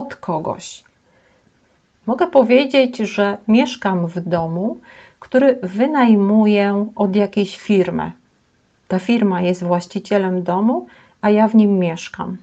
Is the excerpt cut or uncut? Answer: uncut